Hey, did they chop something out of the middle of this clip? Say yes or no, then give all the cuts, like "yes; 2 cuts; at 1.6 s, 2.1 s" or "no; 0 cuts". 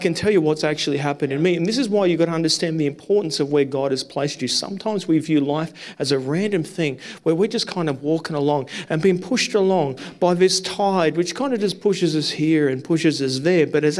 no; 0 cuts